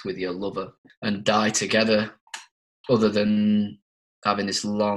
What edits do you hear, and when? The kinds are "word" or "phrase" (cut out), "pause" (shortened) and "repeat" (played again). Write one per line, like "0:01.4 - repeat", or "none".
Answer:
none